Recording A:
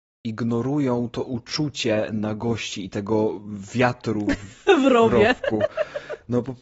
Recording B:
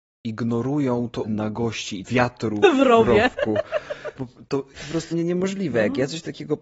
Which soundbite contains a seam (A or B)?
B